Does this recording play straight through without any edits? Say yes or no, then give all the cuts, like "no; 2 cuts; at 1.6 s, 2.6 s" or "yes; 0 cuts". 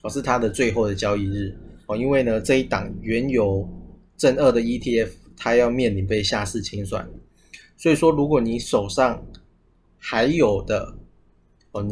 yes; 0 cuts